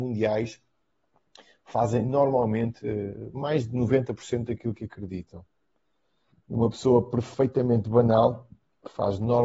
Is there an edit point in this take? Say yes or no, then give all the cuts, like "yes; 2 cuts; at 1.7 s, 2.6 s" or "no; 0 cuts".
no; 0 cuts